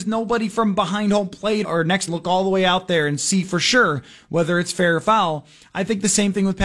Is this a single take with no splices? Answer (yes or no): no